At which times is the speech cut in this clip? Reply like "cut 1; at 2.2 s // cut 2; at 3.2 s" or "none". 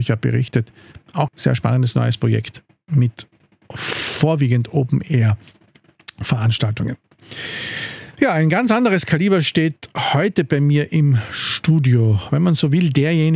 cut 1; at 1.3 s